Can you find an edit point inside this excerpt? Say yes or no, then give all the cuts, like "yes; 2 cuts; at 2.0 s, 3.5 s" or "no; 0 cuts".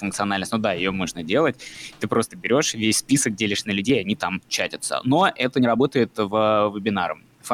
no; 0 cuts